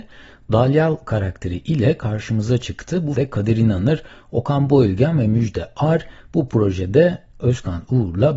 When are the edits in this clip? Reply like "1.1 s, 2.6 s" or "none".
3.1 s